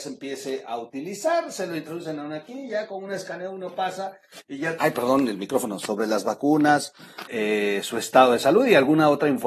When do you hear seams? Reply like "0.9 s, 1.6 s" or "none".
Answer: 4.8 s, 7.3 s

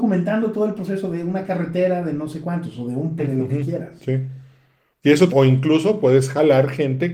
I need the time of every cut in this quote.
3.2 s, 5.3 s

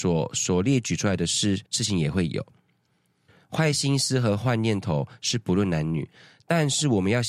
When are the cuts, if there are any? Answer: 1.7 s

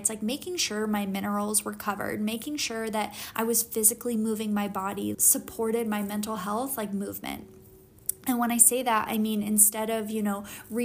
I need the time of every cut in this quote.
5.1 s

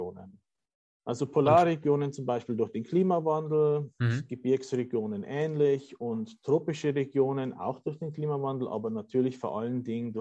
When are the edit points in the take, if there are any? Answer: none

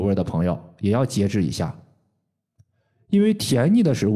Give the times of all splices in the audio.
none

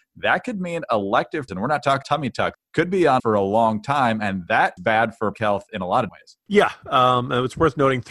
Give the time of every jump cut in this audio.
1.5 s, 2.0 s, 2.5 s, 3.2 s, 4.8 s, 5.3 s, 6.1 s

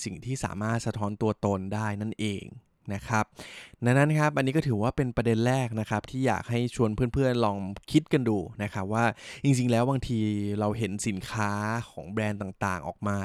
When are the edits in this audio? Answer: none

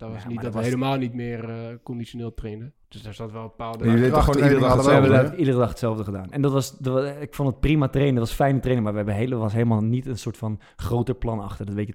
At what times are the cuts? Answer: 2.8 s

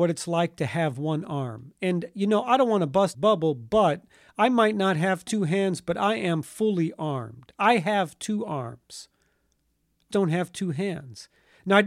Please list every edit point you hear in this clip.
3.1 s, 10.1 s

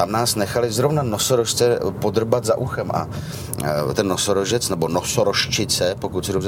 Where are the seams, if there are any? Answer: 3.9 s

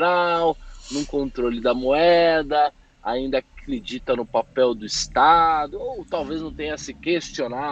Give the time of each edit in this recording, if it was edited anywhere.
none

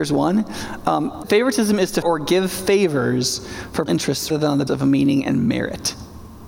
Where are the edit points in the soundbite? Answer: 1.2 s, 2.0 s, 3.9 s, 4.3 s, 4.7 s

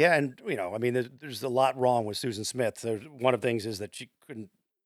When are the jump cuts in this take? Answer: 1.2 s, 3.4 s

